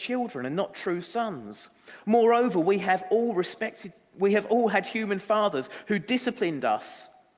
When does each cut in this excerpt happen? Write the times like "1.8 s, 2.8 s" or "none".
none